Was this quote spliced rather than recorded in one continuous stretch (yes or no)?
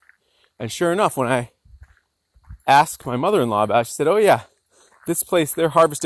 no